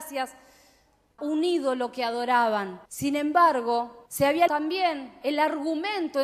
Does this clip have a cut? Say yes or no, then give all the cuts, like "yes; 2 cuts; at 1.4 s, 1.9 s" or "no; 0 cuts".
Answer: yes; 4 cuts; at 1.2 s, 2.9 s, 4.1 s, 4.5 s